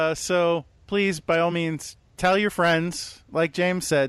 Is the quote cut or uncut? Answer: uncut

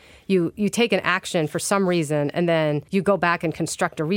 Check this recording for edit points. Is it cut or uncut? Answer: cut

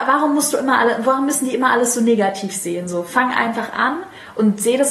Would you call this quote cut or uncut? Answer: uncut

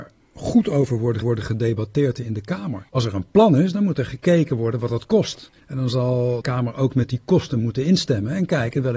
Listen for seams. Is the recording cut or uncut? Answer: cut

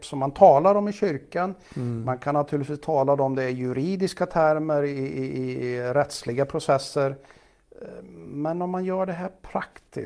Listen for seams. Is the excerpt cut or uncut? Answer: uncut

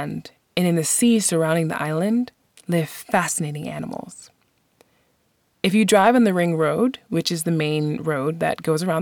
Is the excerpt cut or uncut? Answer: uncut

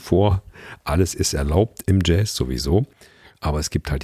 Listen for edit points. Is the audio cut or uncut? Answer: uncut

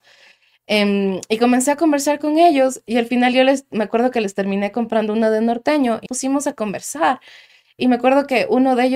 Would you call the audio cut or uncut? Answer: cut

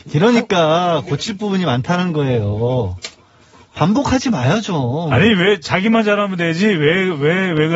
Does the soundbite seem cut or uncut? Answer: uncut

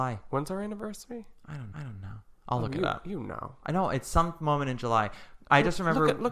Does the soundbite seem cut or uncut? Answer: cut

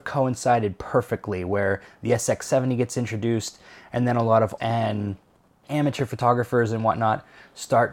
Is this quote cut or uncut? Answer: cut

